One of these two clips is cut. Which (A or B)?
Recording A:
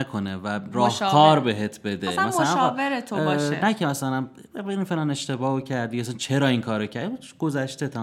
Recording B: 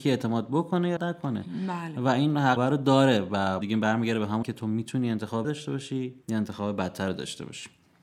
B